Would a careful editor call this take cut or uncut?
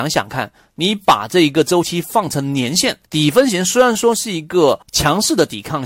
cut